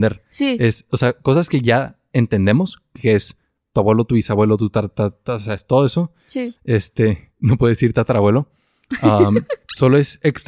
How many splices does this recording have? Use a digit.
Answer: 0